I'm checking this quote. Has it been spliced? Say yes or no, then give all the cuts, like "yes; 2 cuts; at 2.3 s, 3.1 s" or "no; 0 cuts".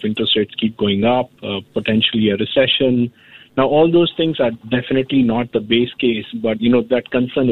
no; 0 cuts